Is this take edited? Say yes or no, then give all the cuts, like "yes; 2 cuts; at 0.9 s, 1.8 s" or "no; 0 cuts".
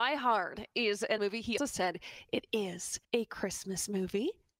yes; 3 cuts; at 1.2 s, 1.6 s, 3.0 s